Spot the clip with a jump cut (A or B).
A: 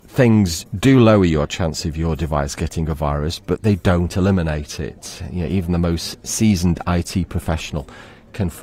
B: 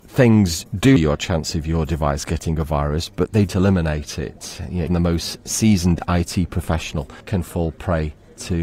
B